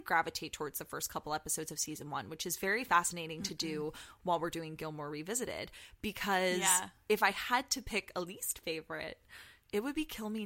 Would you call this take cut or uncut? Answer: uncut